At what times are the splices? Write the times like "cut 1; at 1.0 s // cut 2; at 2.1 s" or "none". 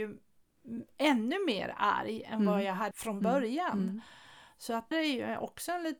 cut 1; at 2.9 s // cut 2; at 4.9 s